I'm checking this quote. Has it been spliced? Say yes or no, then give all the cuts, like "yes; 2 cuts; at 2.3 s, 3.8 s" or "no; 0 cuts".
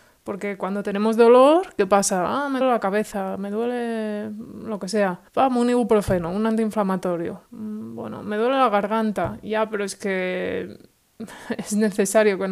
yes; 3 cuts; at 2.6 s, 5.3 s, 7.5 s